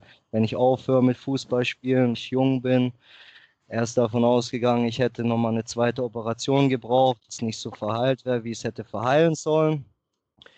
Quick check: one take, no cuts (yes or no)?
no